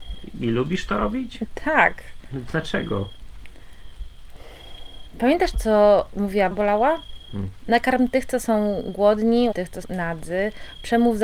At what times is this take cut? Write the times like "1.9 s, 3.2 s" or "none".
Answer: 5.5 s, 6.5 s, 9.5 s, 9.8 s